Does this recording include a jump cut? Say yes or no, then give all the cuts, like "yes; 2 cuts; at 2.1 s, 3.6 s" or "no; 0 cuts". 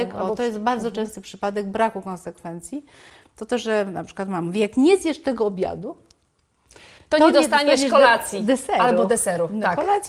no; 0 cuts